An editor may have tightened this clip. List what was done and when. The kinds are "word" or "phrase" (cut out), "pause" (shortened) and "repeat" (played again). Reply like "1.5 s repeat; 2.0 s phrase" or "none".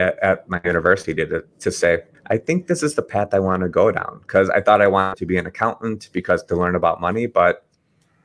2.1 s pause